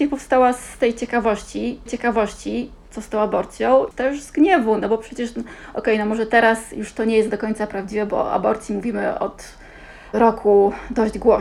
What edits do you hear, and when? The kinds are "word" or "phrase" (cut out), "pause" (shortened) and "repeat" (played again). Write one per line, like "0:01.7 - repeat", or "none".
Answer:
0:01.9 - repeat
0:03.9 - word